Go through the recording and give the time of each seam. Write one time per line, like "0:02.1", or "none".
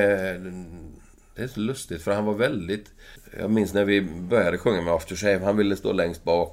0:03.2